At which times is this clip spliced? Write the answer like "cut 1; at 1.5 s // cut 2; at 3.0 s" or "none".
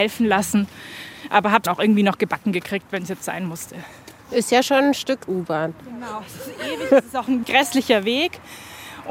cut 1; at 1.7 s // cut 2; at 4.2 s // cut 3; at 5.3 s // cut 4; at 7.4 s